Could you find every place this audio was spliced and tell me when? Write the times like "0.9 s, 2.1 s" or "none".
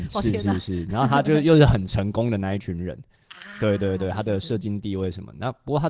none